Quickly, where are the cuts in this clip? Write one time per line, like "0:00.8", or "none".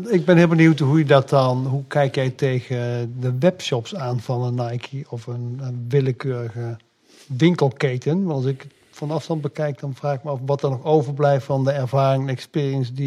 none